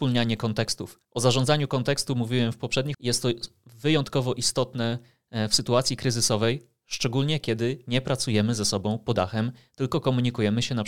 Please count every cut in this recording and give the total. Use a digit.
3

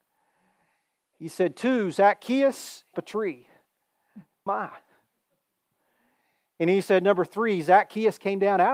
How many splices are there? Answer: 2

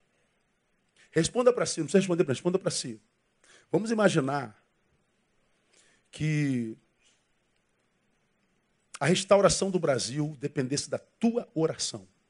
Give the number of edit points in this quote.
0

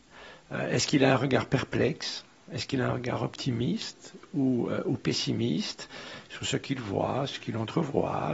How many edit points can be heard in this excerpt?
0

